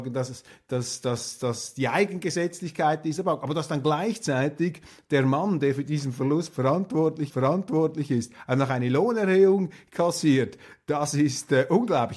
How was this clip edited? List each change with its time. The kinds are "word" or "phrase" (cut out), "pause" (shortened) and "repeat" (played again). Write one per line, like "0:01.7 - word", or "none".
0:07.3 - repeat

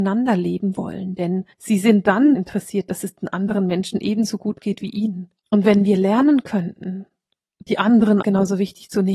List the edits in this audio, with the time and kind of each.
0:01.5 - pause
0:02.3 - word
0:05.4 - pause
0:08.2 - word

